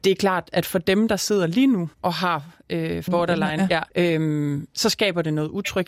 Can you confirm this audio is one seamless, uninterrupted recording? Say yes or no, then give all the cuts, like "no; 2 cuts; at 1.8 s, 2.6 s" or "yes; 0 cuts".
no; 3 cuts; at 1.9 s, 3.1 s, 3.9 s